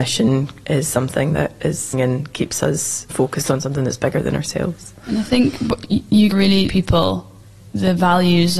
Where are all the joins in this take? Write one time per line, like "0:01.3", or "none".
0:01.9
0:03.1
0:06.3
0:06.7